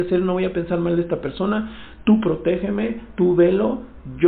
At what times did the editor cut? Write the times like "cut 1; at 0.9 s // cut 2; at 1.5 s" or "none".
none

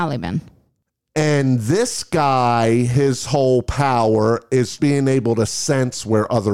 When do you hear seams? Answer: cut 1; at 4.8 s

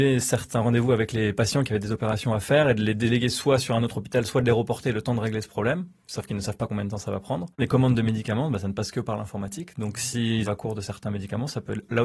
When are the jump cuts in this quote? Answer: cut 1; at 10.5 s

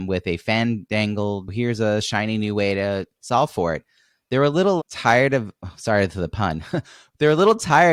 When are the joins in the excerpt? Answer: cut 1; at 4.8 s

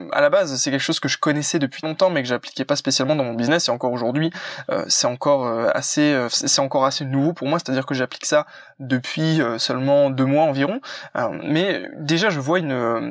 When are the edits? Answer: cut 1; at 1.8 s

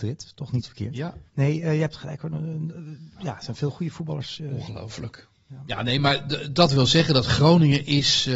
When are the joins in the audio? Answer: cut 1; at 1.3 s

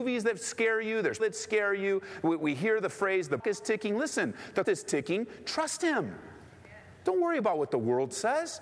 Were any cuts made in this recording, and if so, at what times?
cut 1; at 1.2 s // cut 2; at 3.4 s // cut 3; at 4.6 s

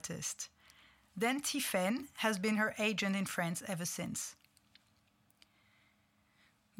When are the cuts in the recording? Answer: none

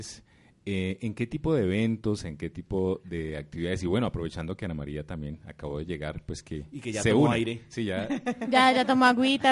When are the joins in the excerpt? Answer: none

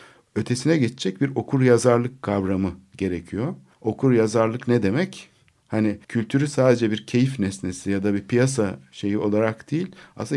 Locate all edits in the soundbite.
cut 1; at 3.7 s // cut 2; at 6.0 s

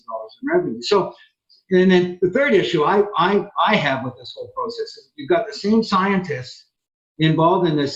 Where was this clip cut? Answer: none

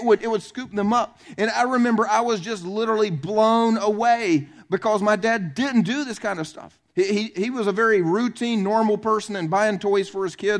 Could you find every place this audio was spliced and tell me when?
cut 1; at 6.9 s

